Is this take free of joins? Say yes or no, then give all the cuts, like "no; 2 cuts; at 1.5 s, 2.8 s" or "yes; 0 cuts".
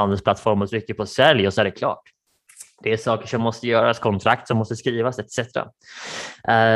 yes; 0 cuts